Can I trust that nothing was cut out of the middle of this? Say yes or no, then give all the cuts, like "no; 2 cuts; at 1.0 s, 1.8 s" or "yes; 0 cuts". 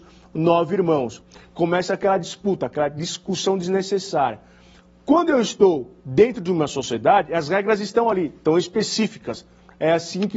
yes; 0 cuts